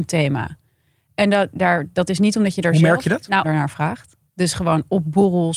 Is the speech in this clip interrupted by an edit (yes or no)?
yes